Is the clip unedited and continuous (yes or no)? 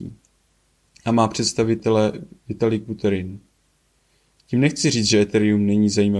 yes